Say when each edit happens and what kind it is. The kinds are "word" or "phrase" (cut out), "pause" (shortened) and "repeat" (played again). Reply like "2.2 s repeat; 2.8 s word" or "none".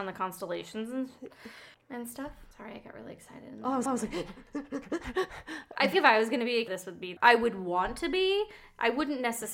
1.7 s pause; 2.5 s pause; 3.9 s repeat; 5.9 s word; 6.7 s word; 7.2 s phrase